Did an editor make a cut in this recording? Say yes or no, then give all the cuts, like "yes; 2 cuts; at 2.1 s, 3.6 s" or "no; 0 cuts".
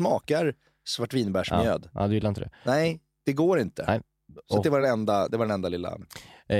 no; 0 cuts